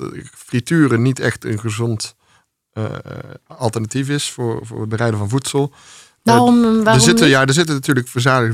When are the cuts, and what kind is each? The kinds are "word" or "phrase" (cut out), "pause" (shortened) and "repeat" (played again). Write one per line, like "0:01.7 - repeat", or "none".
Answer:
none